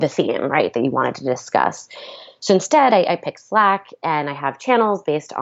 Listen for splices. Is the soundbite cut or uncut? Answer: uncut